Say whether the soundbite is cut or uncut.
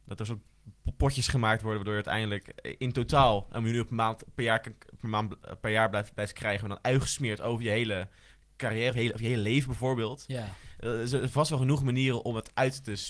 uncut